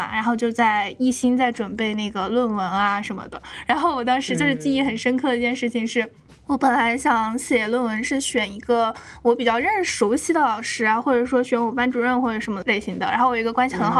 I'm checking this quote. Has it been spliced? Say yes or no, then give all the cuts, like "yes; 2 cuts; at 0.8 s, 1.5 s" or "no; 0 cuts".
yes; 1 cut; at 6.3 s